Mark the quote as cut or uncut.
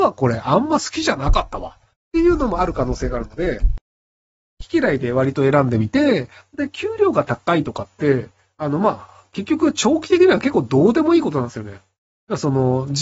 uncut